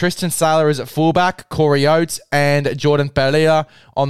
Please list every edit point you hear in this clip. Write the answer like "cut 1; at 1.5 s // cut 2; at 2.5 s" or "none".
none